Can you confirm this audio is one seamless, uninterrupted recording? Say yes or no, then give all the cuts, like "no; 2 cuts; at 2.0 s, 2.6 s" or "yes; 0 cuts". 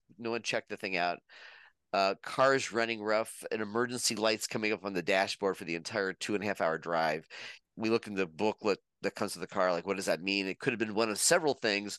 no; 1 cut; at 7.6 s